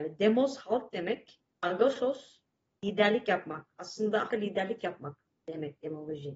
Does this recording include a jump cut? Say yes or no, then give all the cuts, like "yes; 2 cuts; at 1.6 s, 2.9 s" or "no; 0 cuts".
yes; 1 cut; at 4.3 s